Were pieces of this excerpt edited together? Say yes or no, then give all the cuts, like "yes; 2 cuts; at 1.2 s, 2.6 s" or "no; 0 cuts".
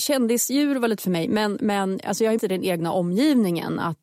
yes; 2 cuts; at 1.0 s, 2.4 s